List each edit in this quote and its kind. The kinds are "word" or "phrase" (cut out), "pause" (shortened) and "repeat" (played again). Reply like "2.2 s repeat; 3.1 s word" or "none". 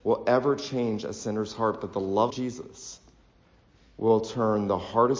2.3 s word